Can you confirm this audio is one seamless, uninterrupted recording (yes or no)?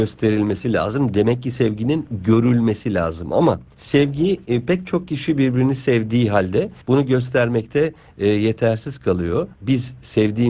no